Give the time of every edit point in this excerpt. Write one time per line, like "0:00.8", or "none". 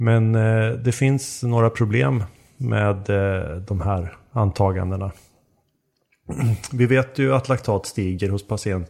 none